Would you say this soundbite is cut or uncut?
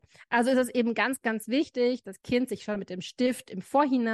cut